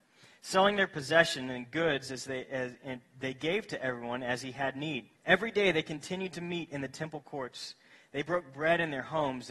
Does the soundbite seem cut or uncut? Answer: cut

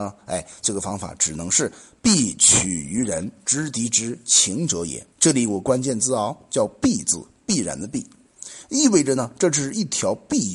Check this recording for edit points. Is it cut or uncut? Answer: cut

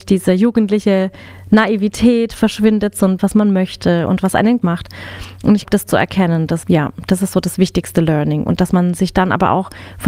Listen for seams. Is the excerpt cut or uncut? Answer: cut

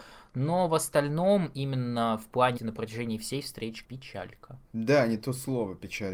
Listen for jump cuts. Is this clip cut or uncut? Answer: cut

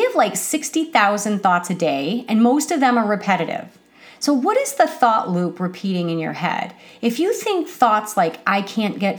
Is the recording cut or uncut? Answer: uncut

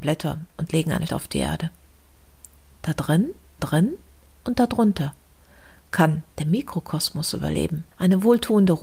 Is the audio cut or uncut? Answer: cut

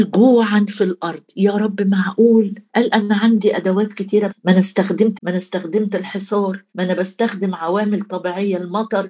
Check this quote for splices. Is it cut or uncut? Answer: cut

